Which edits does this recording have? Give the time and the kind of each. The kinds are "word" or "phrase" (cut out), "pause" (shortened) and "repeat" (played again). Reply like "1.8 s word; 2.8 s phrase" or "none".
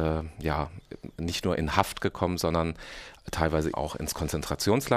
3.7 s word